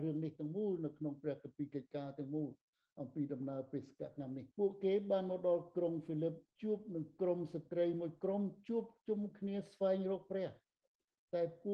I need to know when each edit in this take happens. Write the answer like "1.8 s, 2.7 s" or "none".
4.5 s, 6.5 s